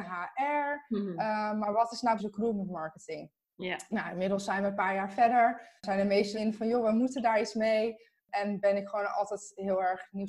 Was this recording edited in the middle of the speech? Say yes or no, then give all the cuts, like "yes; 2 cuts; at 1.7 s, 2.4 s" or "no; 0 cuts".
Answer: yes; 3 cuts; at 2.2 s, 5.8 s, 6.3 s